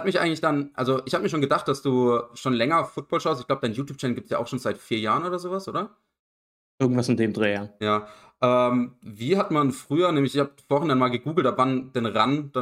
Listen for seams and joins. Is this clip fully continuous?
yes; 0 cuts

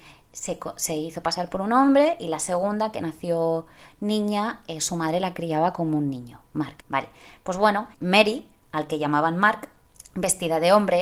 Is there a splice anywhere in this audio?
yes; 2 cuts; at 6.8 s, 7.9 s

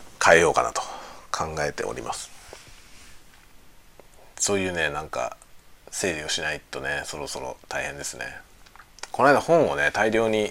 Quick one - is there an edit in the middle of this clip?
yes; 1 cut; at 5.8 s

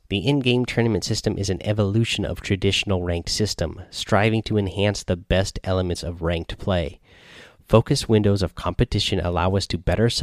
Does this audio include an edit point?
no; 0 cuts

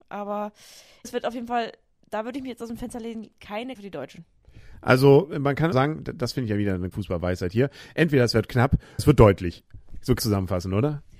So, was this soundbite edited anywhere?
yes; 6 cuts; at 1.0 s, 3.7 s, 5.7 s, 6.9 s, 9.0 s, 10.2 s

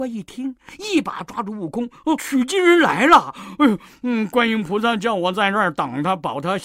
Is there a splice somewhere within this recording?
yes; 1 cut; at 2.2 s

